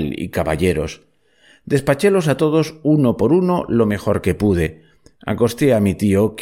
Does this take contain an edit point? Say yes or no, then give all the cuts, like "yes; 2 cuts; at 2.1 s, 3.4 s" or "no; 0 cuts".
no; 0 cuts